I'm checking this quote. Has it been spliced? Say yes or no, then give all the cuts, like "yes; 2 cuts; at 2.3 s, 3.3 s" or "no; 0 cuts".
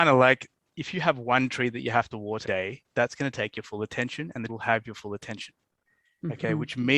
yes; 2 cuts; at 2.4 s, 4.5 s